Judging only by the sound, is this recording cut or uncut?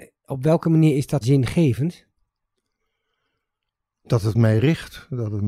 cut